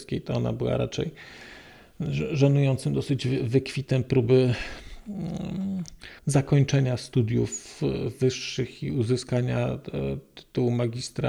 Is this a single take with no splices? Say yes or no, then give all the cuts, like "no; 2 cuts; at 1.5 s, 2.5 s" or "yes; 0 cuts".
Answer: no; 1 cut; at 6.2 s